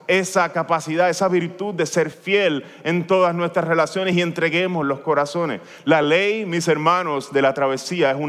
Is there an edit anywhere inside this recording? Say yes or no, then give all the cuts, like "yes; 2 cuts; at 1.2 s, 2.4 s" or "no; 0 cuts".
no; 0 cuts